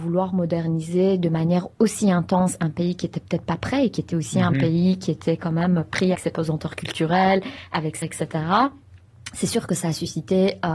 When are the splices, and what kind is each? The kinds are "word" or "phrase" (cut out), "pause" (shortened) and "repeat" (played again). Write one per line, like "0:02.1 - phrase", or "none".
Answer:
0:06.1 - word
0:08.0 - word